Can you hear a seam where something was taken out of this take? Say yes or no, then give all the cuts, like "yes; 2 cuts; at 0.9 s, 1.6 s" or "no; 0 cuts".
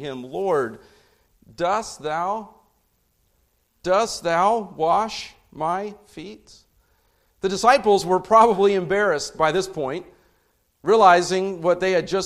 no; 0 cuts